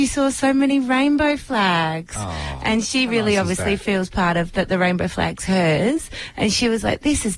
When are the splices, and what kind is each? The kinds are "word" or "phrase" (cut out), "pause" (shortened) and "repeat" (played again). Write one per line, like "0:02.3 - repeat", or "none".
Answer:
none